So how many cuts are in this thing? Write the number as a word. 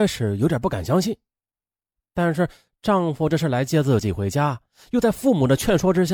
zero